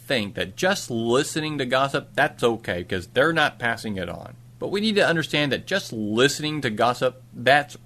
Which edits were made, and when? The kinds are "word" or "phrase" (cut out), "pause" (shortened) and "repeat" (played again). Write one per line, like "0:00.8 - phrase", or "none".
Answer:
0:04.5 - pause